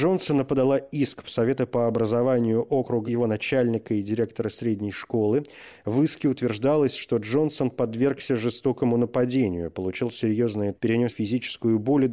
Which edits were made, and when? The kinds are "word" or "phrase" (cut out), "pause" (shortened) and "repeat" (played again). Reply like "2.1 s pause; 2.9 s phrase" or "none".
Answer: 1.2 s word; 3.0 s phrase; 10.7 s word; 11.1 s word